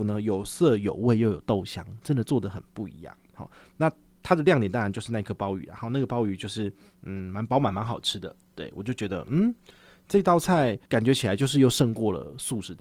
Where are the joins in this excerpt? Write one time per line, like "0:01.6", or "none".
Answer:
0:08.4
0:10.9